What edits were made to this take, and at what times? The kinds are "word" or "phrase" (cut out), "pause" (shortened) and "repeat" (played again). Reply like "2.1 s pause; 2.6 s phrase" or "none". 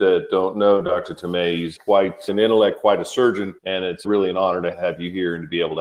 3.6 s pause

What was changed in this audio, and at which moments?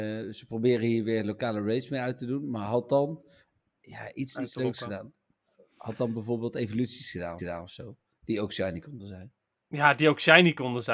7.4 s repeat

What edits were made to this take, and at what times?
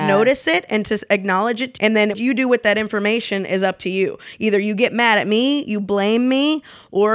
1.8 s word; 2.1 s word

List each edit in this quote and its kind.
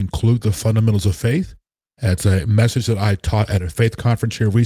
none

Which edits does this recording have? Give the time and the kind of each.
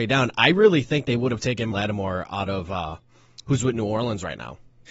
1.7 s word

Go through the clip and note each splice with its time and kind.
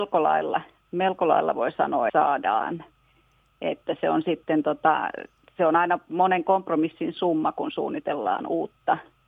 2.1 s word

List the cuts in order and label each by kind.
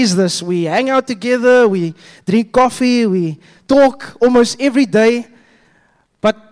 none

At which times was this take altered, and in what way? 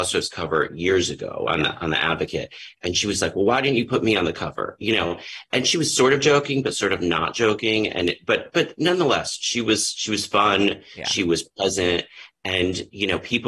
none

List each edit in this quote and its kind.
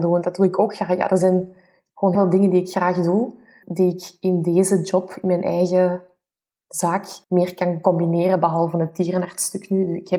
2.1 s word; 3.6 s word; 7.2 s pause

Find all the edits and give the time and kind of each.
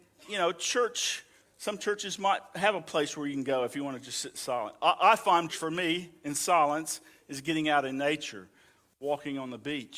5.5 s word

